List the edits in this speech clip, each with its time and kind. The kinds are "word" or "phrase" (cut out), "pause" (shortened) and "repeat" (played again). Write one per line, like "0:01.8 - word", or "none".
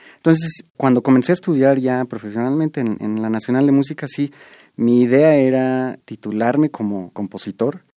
none